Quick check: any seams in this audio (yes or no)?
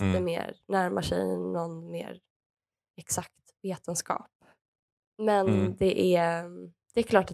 no